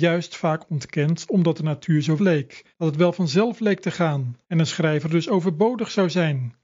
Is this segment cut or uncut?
cut